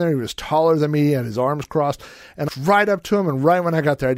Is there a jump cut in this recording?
yes; 1 cut; at 2.5 s

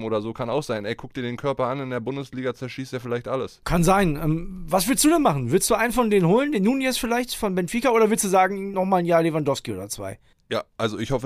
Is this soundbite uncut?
yes; 0 cuts

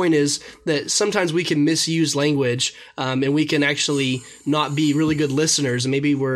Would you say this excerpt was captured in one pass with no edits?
yes; 0 cuts

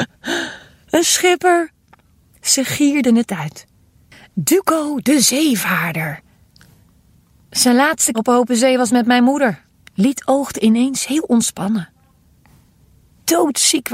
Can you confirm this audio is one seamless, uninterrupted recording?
no; 2 cuts; at 8.1 s, 9.7 s

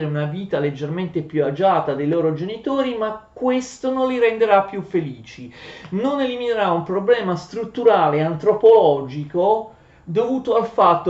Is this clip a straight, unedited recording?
yes; 0 cuts

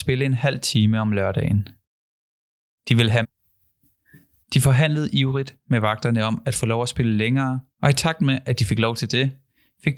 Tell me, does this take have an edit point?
yes; 2 cuts; at 3.2 s, 7.7 s

